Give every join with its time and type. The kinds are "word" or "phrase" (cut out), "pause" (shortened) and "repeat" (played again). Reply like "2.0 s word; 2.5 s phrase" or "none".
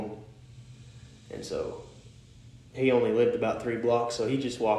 none

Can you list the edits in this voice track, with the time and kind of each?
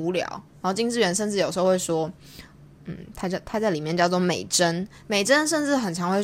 none

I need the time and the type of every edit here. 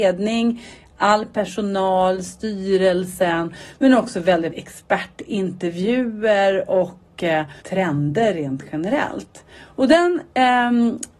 4.5 s word; 7.6 s pause

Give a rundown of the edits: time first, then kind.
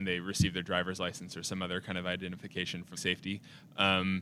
2.9 s phrase

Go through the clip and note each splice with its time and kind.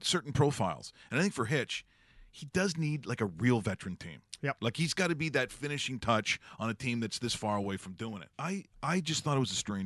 8.3 s pause

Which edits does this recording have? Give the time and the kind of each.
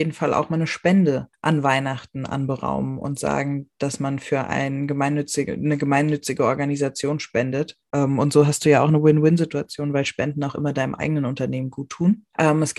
none

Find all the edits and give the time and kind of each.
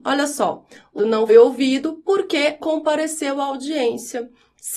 1.0 s word; 1.3 s word; 2.6 s word

